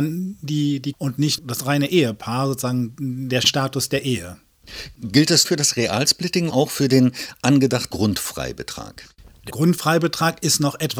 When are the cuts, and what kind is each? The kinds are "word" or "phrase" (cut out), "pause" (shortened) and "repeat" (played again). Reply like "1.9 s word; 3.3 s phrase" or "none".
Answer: 0.9 s word; 1.4 s word; 3.4 s word; 5.4 s word; 6.5 s word; 7.9 s word; 9.5 s word